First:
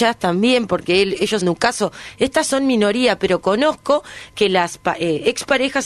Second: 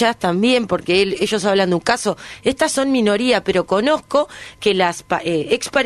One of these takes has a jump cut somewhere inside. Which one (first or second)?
first